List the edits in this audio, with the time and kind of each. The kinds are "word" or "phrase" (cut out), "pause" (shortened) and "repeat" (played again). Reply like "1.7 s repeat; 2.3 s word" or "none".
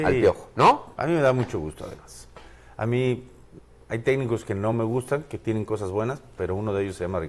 none